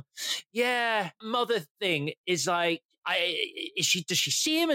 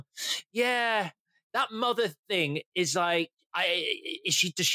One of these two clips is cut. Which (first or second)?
first